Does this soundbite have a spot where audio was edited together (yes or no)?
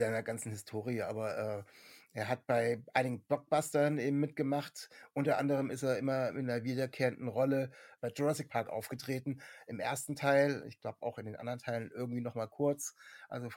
no